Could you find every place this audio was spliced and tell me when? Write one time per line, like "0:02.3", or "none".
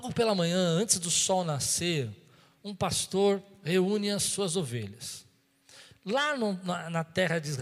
none